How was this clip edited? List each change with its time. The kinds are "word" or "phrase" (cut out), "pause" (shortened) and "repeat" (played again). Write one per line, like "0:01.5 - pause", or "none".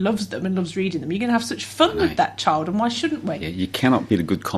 none